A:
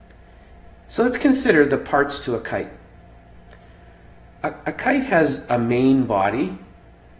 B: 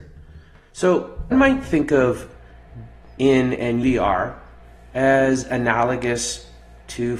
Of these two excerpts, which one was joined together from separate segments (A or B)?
B